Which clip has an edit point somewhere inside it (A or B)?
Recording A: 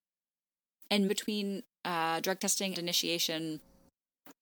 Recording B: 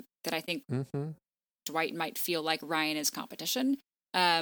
A